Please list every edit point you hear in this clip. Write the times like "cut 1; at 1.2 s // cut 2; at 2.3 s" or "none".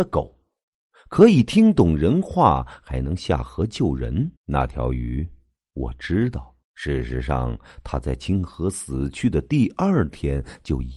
cut 1; at 4.3 s // cut 2; at 6.6 s